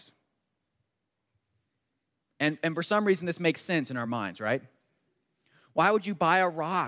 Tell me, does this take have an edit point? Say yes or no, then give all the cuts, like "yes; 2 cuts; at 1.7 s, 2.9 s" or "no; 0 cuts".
no; 0 cuts